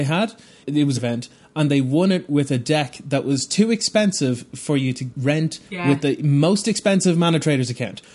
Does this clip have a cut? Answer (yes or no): yes